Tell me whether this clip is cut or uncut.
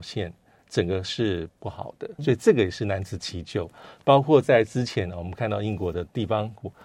cut